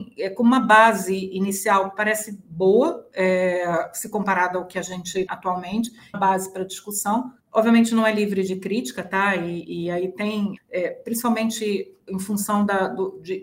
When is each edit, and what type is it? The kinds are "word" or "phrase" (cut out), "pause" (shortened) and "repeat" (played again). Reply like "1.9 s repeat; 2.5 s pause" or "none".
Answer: 5.3 s word; 6.1 s phrase; 7.4 s pause; 8.5 s phrase; 10.6 s word